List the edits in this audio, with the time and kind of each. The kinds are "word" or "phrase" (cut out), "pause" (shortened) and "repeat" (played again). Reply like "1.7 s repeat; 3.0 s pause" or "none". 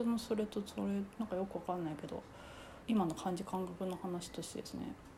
2.8 s pause